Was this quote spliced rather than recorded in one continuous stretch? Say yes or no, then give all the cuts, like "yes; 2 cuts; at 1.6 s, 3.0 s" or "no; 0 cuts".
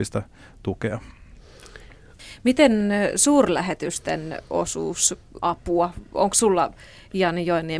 yes; 1 cut; at 5.4 s